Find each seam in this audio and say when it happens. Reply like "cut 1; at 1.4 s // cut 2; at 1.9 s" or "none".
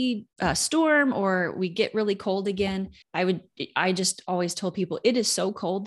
cut 1; at 3.0 s